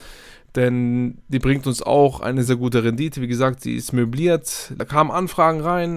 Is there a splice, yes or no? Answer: yes